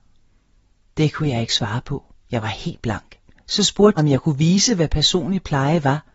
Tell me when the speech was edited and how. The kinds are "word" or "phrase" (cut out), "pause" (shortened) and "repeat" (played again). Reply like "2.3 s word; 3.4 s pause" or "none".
3.3 s pause; 4.0 s phrase